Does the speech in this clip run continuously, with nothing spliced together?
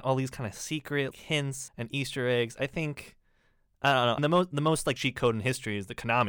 no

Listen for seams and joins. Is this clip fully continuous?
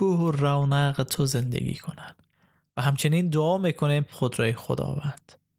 no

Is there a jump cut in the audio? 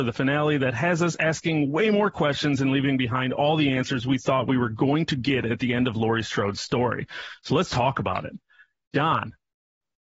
no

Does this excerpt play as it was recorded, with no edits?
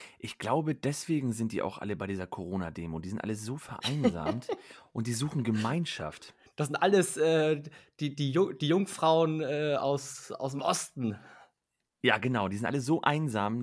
yes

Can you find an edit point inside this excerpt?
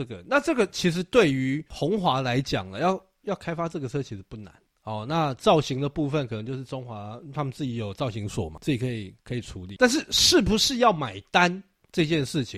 no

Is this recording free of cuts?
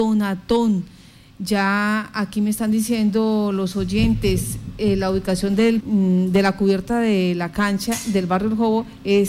no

